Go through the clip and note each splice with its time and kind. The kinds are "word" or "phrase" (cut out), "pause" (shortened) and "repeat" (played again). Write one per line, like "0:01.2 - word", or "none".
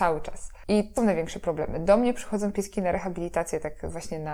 0:01.0 - word